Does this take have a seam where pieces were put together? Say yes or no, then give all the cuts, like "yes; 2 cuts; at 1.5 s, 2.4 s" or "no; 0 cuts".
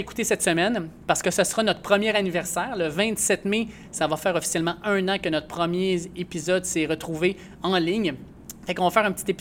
no; 0 cuts